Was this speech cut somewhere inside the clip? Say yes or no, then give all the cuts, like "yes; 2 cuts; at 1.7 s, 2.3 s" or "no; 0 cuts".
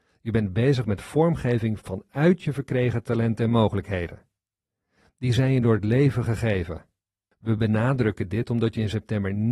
no; 0 cuts